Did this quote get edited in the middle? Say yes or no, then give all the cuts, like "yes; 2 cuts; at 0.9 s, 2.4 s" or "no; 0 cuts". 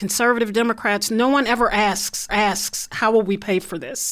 yes; 1 cut; at 2.3 s